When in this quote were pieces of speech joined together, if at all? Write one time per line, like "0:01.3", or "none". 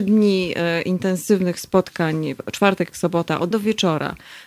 0:02.9
0:03.5